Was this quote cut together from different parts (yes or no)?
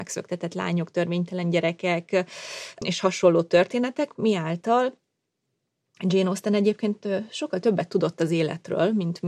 no